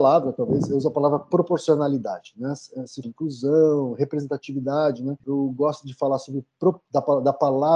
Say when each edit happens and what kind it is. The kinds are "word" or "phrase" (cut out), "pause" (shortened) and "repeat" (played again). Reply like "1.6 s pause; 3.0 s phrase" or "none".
3.0 s phrase; 5.2 s pause